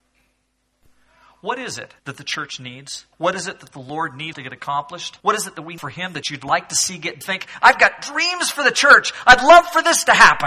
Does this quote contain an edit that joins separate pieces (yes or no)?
yes